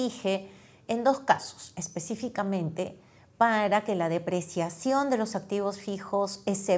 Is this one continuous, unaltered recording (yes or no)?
yes